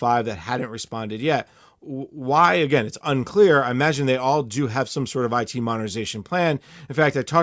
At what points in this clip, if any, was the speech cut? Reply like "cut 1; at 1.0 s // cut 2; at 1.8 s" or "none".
none